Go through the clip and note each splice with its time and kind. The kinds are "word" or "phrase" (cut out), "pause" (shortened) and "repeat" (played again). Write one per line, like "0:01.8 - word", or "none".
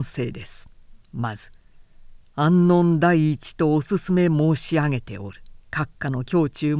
0:01.0 - pause
0:05.6 - pause